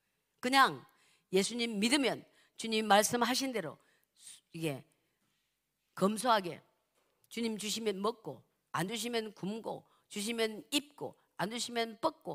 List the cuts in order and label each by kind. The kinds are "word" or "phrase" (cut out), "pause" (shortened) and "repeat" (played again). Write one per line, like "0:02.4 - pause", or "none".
none

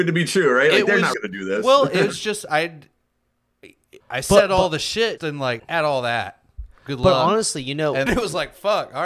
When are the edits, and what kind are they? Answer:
0:01.1 - word
0:04.0 - word
0:05.2 - word
0:05.6 - word
0:08.1 - phrase

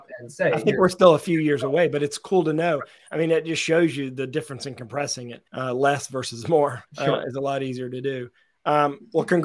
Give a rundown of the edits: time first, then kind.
0:05.5 - pause
0:06.9 - pause

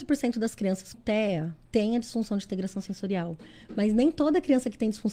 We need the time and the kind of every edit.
0:00.9 - word
0:01.7 - pause

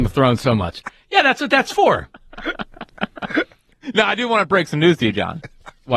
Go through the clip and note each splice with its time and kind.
none

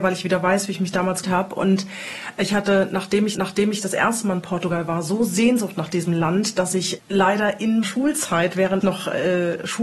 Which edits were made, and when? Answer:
0:01.2 - word
0:03.3 - repeat
0:07.8 - word
0:08.8 - word

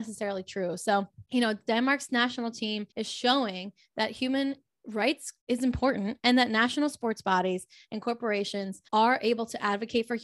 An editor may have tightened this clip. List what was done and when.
0:01.2 - pause
0:02.9 - pause
0:05.4 - pause
0:08.9 - pause

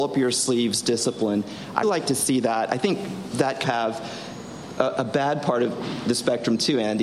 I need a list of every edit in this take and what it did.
0:01.8 - word
0:03.6 - word

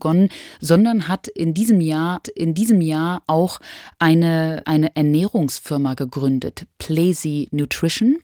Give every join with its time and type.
0:02.2 - repeat
0:04.6 - word

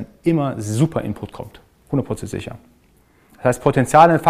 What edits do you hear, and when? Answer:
none

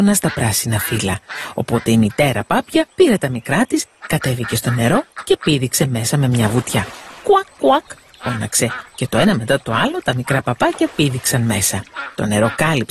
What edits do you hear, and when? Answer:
0:02.9 - pause
0:07.2 - pause

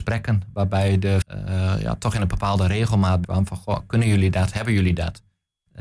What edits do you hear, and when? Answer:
0:01.2 - word
0:03.2 - word

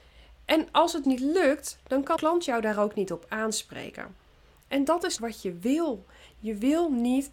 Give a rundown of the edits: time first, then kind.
0:01.0 - word
0:02.2 - word
0:05.2 - word

